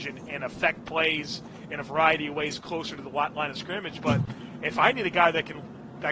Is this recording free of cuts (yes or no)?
yes